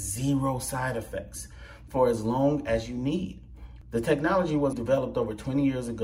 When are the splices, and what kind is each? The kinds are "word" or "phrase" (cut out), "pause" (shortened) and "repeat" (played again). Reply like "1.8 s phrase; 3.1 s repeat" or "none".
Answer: 4.7 s word

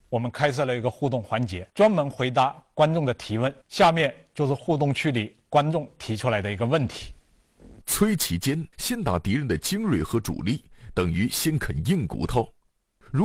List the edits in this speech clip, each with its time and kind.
1.7 s pause; 3.6 s pause; 7.8 s pause; 8.7 s pause

